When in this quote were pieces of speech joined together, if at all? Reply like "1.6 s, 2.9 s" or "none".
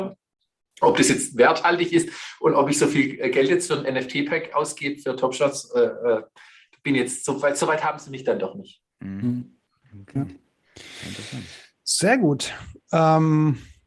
none

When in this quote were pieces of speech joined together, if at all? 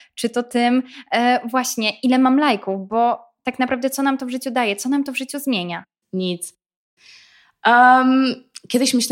none

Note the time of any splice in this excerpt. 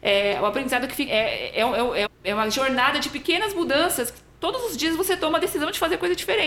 1.1 s, 2.1 s

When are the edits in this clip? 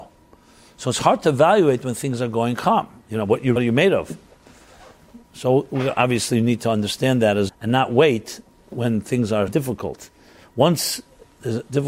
3.6 s, 7.5 s, 9.5 s

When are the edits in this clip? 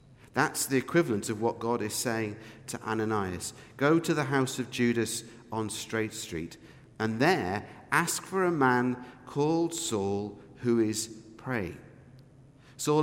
none

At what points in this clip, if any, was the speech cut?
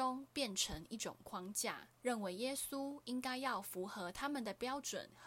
1.9 s

